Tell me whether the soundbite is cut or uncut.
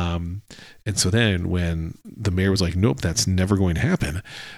uncut